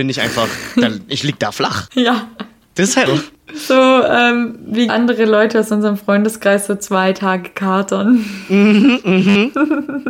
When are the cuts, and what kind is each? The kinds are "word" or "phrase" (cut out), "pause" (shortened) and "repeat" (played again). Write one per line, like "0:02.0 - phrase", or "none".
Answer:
0:03.1 - word
0:04.9 - word